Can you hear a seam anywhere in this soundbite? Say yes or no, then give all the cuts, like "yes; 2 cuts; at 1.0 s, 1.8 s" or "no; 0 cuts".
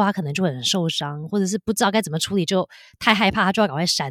no; 0 cuts